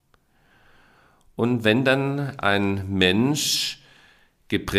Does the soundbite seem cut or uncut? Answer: uncut